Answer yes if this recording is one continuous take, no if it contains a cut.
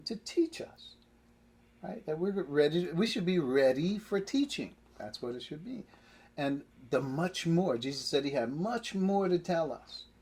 yes